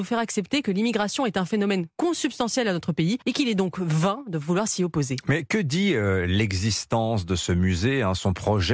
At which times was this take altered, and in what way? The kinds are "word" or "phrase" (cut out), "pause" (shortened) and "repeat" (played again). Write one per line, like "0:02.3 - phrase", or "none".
0:03.2 - pause

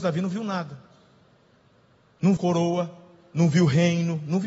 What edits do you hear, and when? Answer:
0:02.4 - word

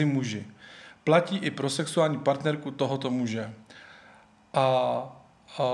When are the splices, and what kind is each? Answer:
none

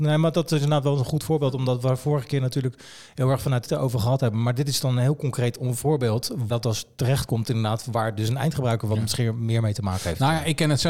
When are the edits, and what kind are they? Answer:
0:03.7 - phrase
0:06.5 - word

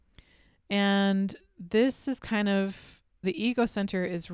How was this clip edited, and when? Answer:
0:03.2 - word

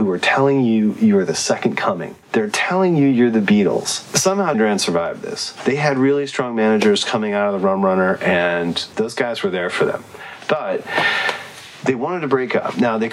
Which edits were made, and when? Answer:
0:02.2 - pause
0:04.5 - word
0:08.9 - word

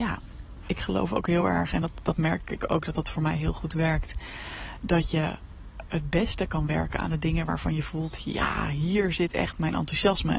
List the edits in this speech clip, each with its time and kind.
none

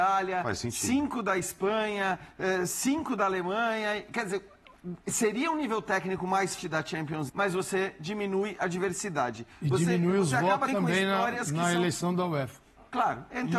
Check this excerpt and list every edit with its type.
0:05.0 - pause
0:06.6 - word
0:07.3 - word
0:10.7 - word

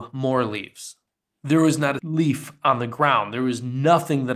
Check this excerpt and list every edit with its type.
0:02.0 - word

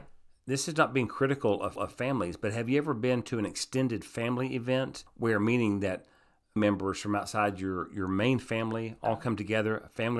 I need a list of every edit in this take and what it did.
0:01.8 - repeat
0:05.1 - pause
0:06.6 - word

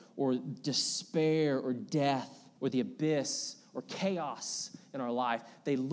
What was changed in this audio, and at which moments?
0:02.6 - pause

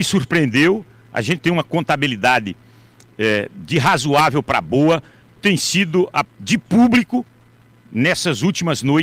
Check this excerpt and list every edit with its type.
0:01.4 - word
0:05.4 - word
0:06.2 - word

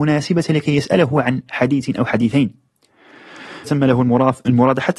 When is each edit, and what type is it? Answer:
0:03.6 - word

